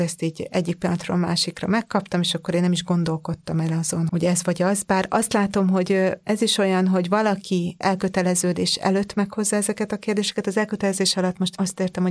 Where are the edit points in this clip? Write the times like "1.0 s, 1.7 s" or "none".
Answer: 4.1 s, 7.8 s